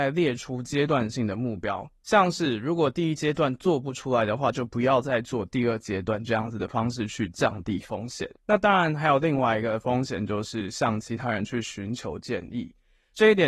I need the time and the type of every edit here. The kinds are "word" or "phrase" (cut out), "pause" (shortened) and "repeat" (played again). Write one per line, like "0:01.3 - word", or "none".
0:08.4 - pause